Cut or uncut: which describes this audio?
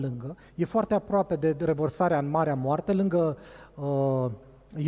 uncut